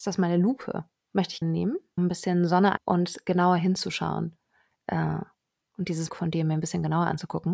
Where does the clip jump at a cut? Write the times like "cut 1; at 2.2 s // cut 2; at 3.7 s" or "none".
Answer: cut 1; at 1.4 s // cut 2; at 2.0 s // cut 3; at 2.8 s // cut 4; at 6.1 s